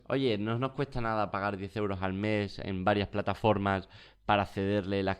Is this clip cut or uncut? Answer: uncut